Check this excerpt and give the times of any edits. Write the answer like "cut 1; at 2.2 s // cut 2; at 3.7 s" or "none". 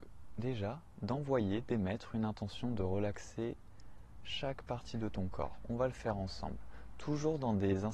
none